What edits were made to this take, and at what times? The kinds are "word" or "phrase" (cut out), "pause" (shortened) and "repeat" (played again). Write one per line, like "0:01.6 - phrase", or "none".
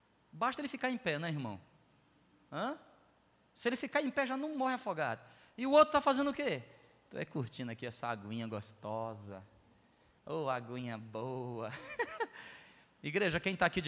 none